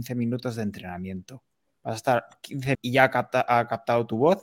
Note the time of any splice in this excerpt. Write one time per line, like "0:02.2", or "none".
0:02.7